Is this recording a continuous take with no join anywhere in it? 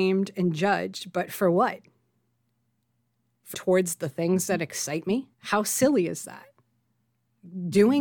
no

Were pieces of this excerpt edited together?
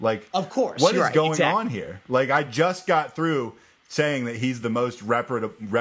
no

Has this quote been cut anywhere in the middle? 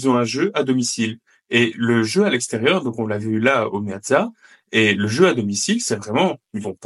no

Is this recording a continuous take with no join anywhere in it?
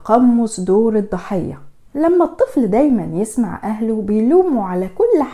yes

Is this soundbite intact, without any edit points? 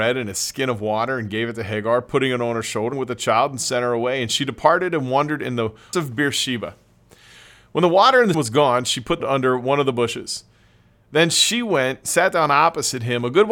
no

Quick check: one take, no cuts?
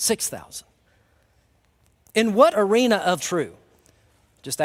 no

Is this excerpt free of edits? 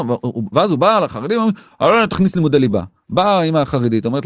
yes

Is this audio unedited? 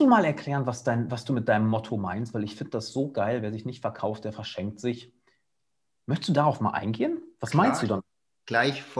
yes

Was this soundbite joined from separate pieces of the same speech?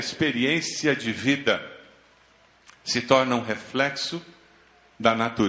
no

